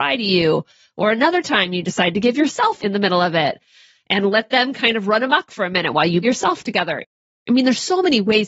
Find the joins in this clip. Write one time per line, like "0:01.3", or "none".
0:02.8
0:06.2